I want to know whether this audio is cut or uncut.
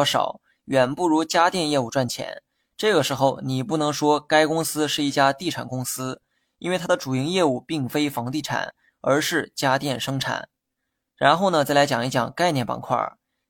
uncut